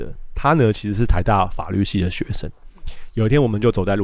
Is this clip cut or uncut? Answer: uncut